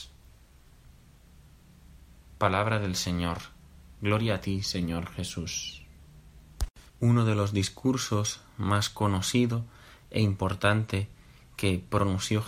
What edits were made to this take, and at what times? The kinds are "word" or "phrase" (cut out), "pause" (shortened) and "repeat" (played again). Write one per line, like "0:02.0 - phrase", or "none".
0:06.9 - pause